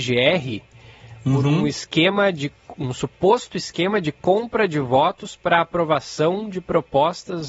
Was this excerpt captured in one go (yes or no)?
yes